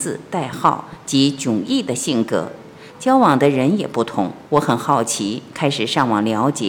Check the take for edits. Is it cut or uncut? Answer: cut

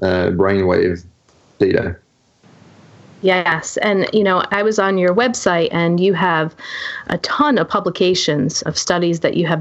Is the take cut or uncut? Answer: cut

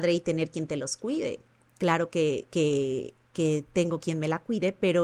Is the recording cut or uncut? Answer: uncut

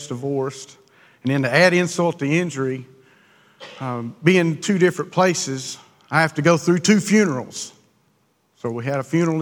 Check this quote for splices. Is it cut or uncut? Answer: uncut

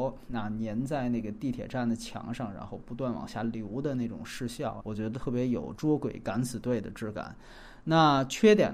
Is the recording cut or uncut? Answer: cut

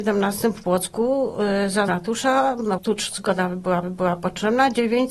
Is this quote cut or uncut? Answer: cut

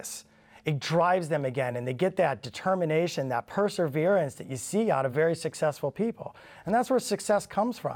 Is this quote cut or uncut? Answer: uncut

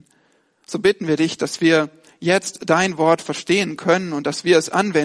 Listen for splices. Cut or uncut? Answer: uncut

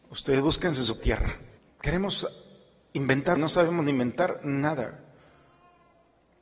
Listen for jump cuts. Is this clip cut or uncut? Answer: cut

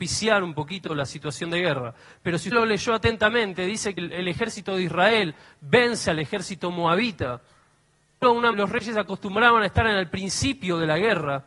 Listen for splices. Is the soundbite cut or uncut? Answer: cut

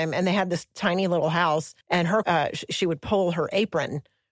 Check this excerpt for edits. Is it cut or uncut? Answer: cut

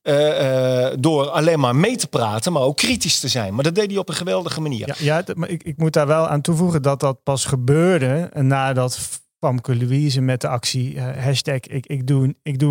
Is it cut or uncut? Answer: uncut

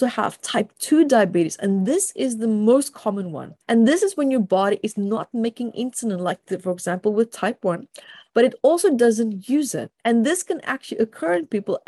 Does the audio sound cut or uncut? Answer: cut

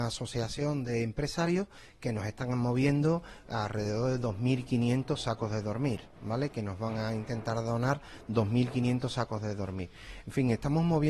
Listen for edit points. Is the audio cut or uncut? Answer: uncut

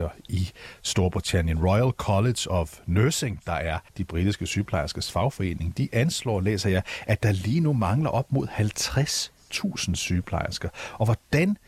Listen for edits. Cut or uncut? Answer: cut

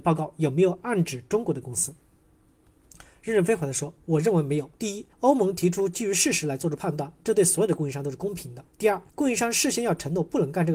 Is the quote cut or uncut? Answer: cut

